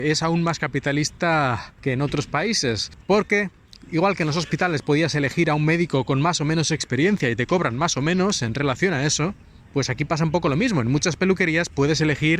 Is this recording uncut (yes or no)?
yes